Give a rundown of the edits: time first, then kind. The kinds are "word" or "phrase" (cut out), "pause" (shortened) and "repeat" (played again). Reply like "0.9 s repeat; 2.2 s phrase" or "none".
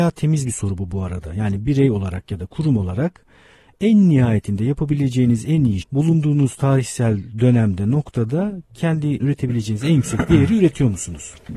5.8 s word; 9.2 s word